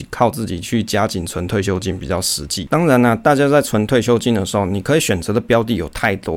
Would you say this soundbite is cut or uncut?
uncut